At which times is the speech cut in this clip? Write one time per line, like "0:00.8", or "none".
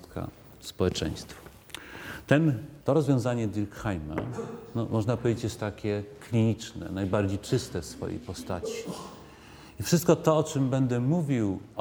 0:02.8